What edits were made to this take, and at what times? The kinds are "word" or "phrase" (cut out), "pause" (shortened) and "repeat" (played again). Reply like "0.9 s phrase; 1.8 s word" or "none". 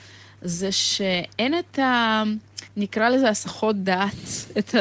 2.7 s pause